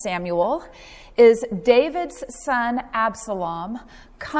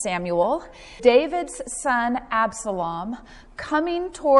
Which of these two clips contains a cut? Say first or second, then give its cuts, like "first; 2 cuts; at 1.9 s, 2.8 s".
second; 1 cut; at 1.0 s